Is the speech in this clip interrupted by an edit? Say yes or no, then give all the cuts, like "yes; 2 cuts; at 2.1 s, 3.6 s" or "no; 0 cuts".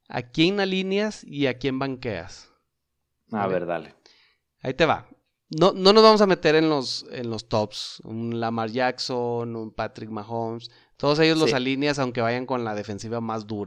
no; 0 cuts